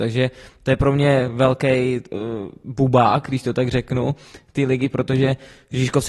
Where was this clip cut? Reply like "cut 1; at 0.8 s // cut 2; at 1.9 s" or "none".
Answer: none